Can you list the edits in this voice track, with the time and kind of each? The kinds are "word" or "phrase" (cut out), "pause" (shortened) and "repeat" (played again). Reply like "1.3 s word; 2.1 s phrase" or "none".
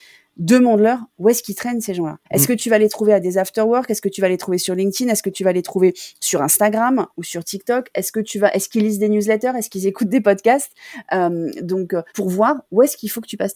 2.3 s pause; 12.1 s pause